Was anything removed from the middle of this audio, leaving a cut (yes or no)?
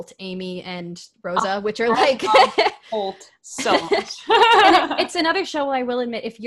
no